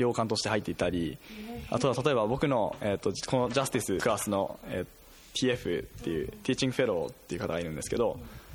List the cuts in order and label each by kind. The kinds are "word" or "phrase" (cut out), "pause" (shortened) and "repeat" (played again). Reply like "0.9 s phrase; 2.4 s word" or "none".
none